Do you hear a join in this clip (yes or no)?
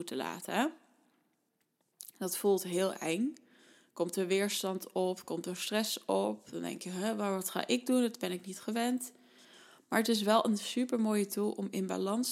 no